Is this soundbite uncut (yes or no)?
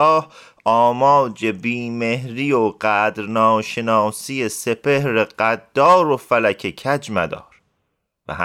yes